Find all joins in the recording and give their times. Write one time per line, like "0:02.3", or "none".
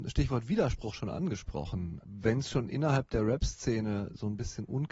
none